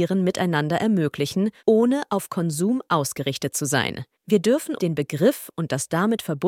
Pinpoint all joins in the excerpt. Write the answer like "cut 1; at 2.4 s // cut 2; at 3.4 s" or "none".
cut 1; at 1.6 s // cut 2; at 4.1 s // cut 3; at 4.8 s